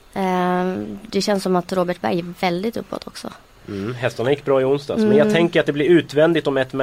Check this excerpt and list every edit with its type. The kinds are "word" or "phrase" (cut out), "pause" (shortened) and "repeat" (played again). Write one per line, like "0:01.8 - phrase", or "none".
none

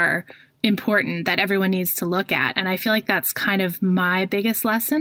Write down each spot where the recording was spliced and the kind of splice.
none

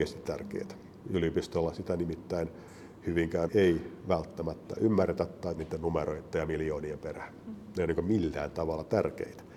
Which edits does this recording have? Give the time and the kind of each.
0:03.5 - word
0:05.6 - phrase

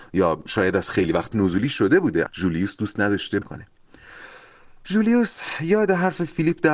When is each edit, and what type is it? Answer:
0:01.3 - word
0:02.3 - word
0:03.4 - word

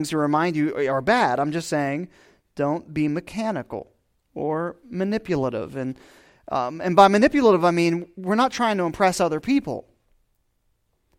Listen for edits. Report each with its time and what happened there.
none

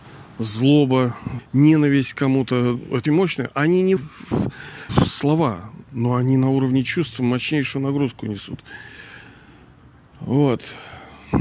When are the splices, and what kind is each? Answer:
0:01.4 - word
0:03.1 - word
0:04.0 - word
0:04.9 - word

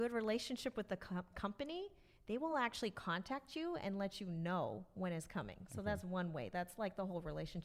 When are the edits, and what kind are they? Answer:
none

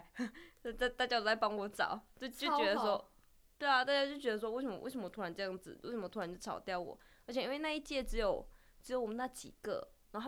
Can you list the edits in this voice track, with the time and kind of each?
none

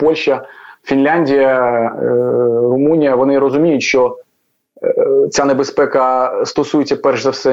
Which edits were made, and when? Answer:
none

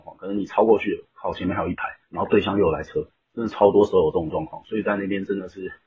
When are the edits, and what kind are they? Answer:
0:02.0 - pause

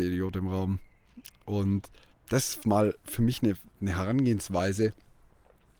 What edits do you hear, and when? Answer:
0:02.1 - pause

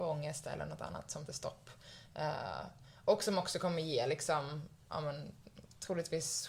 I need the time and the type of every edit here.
0:01.3 - word

